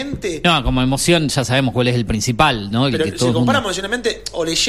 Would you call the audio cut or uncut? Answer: uncut